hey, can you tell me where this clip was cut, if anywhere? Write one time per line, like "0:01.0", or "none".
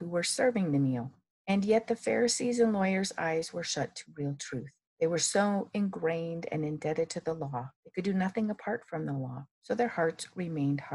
0:01.3
0:04.9
0:07.7
0:09.5

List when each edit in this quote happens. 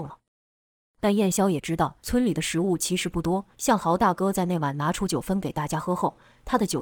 0:02.0
0:03.5

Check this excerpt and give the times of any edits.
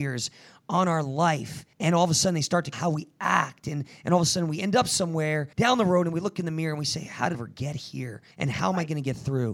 0:01.7
0:02.7
0:05.5
0:07.3
0:08.3

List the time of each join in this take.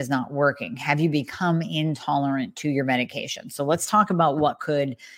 none

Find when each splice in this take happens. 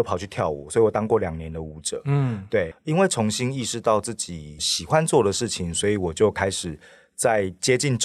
none

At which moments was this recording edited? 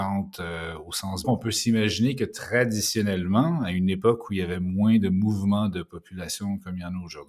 0:01.2

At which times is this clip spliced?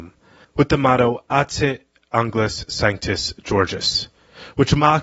none

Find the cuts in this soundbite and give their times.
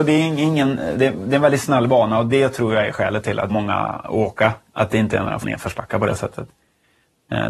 0:03.5
0:05.4

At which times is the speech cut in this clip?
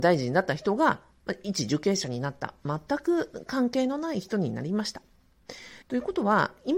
0:05.8

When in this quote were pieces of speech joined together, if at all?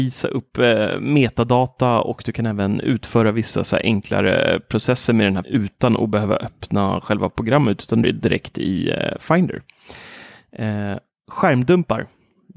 0:05.4
0:08.0

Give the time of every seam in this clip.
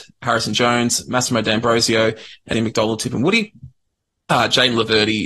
0:02.5

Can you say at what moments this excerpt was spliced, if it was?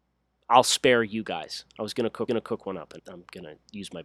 0:02.3
0:03.0

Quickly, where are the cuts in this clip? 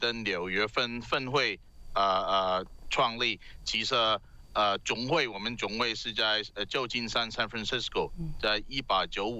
none

